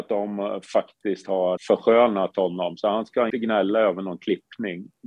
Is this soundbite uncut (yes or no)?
no